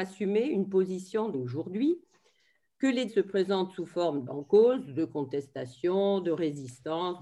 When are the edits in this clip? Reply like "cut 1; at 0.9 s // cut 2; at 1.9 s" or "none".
cut 1; at 1.3 s // cut 2; at 3.1 s // cut 3; at 4.3 s